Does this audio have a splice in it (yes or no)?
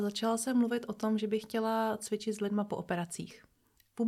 no